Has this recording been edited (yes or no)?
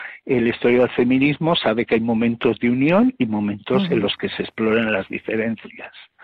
no